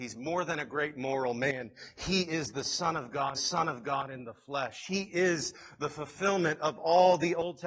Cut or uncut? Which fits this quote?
cut